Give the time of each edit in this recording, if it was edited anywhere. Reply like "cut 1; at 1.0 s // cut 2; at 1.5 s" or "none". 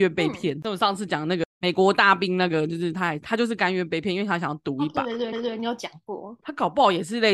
cut 1; at 5.3 s